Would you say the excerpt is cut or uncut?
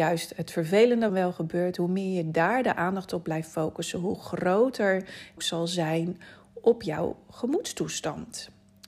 cut